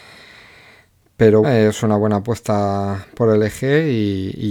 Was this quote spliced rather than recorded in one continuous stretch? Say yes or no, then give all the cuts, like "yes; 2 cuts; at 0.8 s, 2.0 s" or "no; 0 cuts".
yes; 1 cut; at 1.4 s